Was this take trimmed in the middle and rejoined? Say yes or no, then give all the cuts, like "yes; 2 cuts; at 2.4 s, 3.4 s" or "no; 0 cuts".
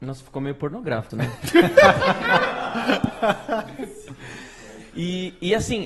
yes; 1 cut; at 1.1 s